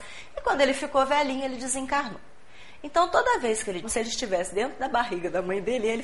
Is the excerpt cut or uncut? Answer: cut